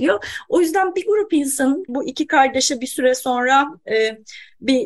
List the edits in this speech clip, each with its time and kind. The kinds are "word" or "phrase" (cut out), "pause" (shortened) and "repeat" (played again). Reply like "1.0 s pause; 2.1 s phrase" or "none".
1.9 s word

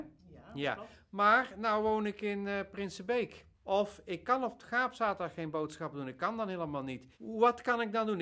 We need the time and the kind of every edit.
3.5 s pause; 7.1 s pause

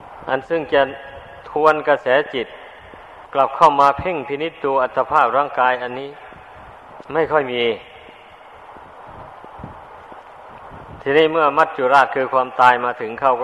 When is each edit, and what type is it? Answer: 7.0 s pause

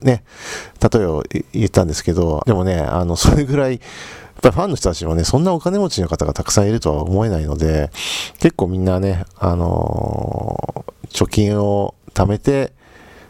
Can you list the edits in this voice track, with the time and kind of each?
2.4 s phrase; 12.0 s pause

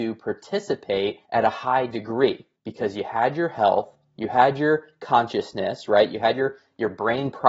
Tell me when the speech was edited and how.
1.2 s pause; 2.6 s pause

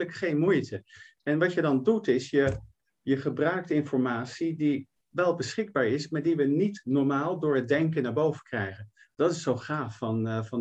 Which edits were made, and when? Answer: none

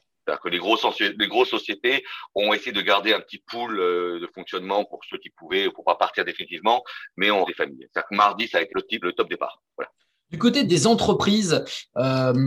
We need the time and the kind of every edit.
7.5 s word; 8.7 s word; 9.0 s word; 10.6 s word

